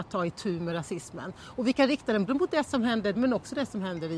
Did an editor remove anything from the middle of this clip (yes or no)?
yes